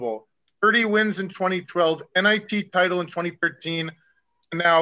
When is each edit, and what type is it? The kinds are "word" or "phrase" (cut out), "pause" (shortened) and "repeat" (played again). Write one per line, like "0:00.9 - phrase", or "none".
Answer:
none